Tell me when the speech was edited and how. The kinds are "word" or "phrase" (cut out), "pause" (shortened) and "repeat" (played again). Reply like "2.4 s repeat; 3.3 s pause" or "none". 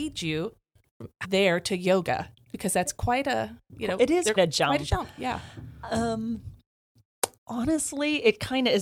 1.2 s phrase; 4.4 s word; 7.4 s pause